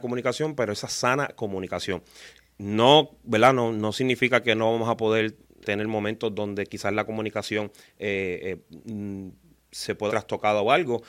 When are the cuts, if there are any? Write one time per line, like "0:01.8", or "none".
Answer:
0:05.6
0:10.1